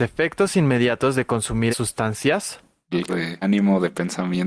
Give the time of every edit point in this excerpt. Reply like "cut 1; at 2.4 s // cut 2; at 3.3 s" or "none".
cut 1; at 1.7 s // cut 2; at 3.1 s // cut 3; at 3.4 s